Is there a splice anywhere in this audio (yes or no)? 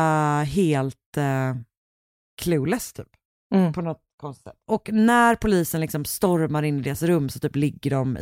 yes